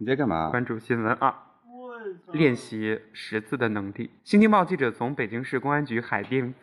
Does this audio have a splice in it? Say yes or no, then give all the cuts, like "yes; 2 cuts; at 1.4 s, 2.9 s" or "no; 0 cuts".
yes; 2 cuts; at 2.2 s, 4.2 s